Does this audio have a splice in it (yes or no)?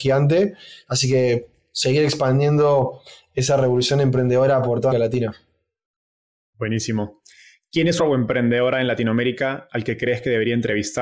yes